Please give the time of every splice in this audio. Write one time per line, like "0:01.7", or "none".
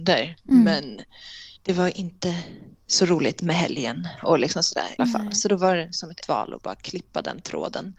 0:01.6
0:02.7
0:05.0
0:06.2